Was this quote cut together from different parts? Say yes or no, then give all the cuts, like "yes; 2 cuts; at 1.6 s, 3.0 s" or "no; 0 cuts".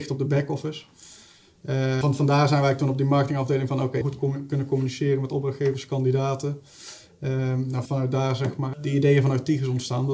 yes; 4 cuts; at 2.0 s, 4.0 s, 7.8 s, 8.7 s